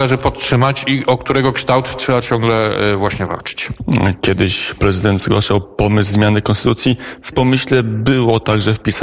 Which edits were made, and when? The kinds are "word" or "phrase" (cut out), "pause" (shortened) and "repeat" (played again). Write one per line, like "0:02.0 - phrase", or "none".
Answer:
0:04.8 - word
0:07.3 - word